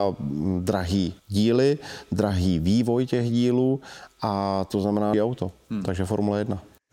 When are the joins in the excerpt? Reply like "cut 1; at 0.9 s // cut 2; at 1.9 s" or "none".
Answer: cut 1; at 1.2 s // cut 2; at 5.1 s